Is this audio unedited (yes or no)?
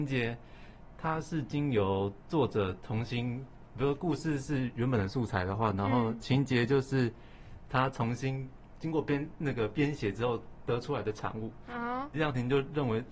no